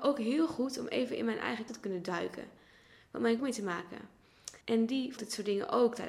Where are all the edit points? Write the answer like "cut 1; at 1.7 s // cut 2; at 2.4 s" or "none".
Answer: cut 1; at 1.7 s // cut 2; at 3.4 s // cut 3; at 4.6 s // cut 4; at 5.2 s